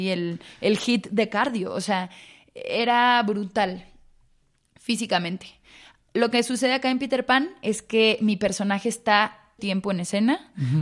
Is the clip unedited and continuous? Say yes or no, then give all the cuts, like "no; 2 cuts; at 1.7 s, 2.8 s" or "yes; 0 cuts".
no; 1 cut; at 9.6 s